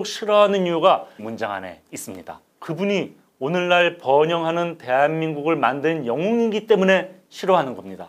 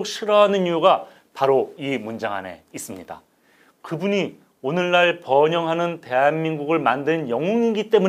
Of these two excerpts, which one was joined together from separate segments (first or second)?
first